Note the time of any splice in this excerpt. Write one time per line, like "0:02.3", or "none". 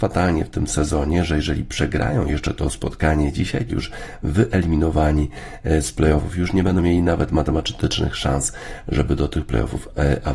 0:03.7